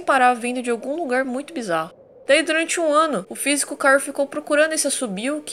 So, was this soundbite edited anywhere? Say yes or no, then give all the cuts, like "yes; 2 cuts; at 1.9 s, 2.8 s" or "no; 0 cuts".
no; 0 cuts